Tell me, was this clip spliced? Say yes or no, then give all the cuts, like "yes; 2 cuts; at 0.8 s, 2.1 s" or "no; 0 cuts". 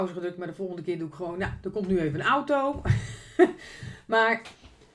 no; 0 cuts